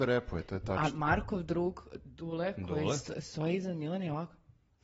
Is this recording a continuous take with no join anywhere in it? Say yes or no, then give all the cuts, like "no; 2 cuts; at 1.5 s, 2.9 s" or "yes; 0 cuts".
yes; 0 cuts